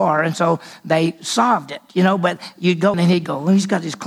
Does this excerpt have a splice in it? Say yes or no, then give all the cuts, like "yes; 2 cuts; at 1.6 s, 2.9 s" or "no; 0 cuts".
yes; 1 cut; at 2.9 s